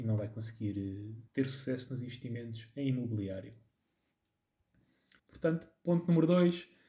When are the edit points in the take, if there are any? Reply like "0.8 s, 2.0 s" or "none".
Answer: 1.3 s, 5.2 s